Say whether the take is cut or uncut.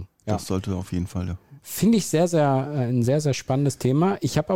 uncut